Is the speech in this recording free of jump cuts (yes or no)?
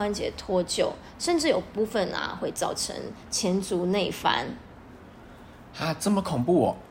yes